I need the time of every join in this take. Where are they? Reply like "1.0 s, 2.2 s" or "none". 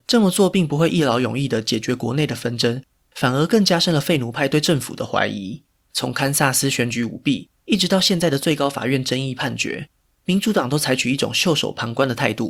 5.7 s